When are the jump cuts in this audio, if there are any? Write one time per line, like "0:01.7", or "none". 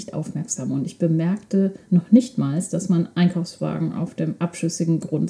0:01.8